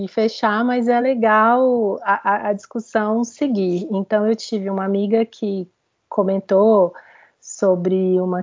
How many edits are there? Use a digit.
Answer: 0